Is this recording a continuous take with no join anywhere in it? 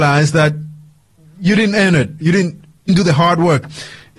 no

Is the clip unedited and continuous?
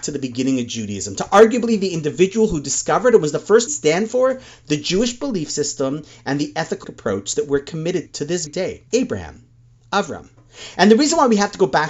no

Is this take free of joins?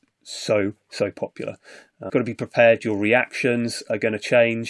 no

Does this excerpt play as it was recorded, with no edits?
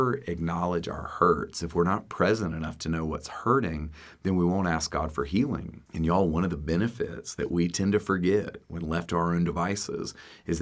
no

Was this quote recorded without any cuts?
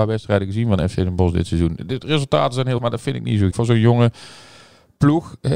no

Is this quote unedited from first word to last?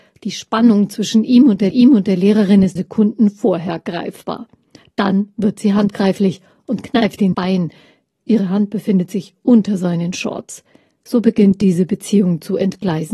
no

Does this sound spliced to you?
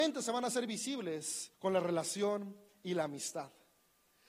yes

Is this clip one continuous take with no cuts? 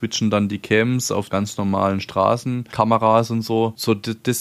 no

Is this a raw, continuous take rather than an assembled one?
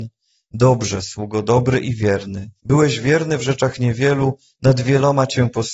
no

